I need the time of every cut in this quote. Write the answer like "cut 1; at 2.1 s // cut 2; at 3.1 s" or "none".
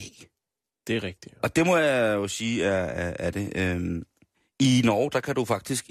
none